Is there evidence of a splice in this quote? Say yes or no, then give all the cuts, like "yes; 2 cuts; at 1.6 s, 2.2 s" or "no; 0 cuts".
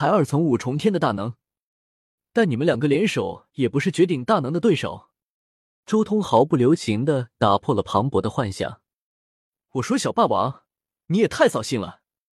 no; 0 cuts